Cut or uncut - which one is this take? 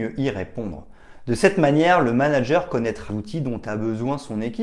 cut